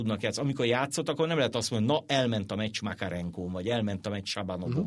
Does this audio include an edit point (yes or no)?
no